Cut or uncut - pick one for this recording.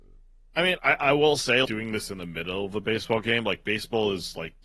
cut